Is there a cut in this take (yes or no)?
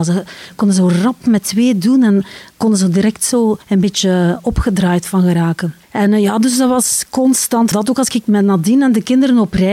yes